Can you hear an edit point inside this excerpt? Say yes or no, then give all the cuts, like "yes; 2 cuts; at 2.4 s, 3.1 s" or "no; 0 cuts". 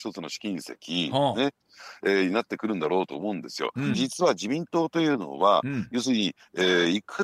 yes; 1 cut; at 3.9 s